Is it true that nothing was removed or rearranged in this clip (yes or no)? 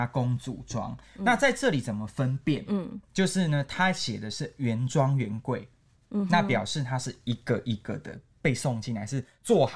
yes